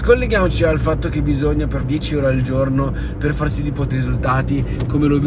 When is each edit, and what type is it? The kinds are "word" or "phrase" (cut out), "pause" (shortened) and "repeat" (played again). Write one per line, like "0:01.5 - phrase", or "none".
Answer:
0:01.8 - phrase
0:03.9 - word